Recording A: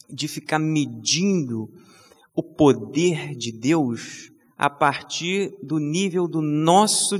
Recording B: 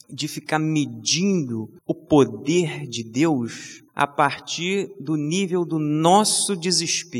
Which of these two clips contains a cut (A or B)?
B